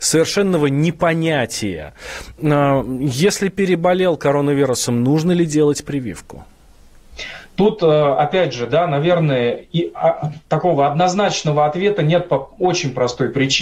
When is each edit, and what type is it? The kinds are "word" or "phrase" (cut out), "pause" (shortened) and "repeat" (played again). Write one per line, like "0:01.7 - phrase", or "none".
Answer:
0:10.5 - pause